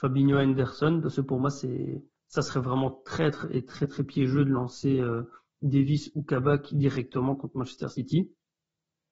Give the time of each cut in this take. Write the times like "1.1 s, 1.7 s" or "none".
none